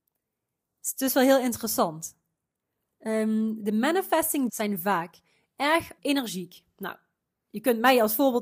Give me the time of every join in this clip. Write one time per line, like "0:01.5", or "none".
0:04.5
0:06.0